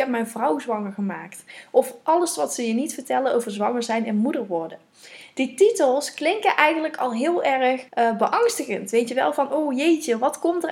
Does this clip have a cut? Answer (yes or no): yes